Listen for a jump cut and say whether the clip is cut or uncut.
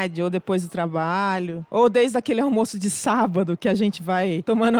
uncut